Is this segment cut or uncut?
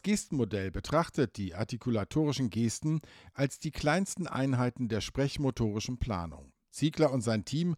uncut